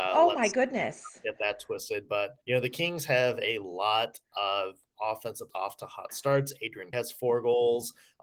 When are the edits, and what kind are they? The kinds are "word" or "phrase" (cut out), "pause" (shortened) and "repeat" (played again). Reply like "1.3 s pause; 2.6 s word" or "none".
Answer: 2.4 s pause; 5.5 s word; 6.9 s word